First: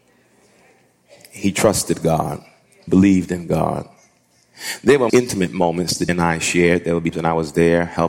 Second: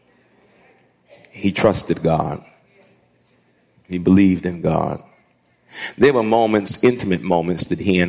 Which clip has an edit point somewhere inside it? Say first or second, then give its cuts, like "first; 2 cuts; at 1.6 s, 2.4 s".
first; 4 cuts; at 2.9 s, 5.1 s, 6.1 s, 7.1 s